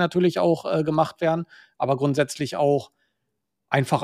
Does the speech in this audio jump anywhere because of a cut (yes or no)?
no